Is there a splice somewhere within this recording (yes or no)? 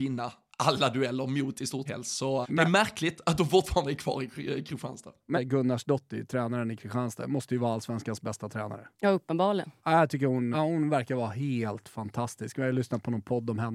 yes